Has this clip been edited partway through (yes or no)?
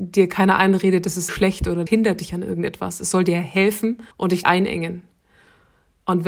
yes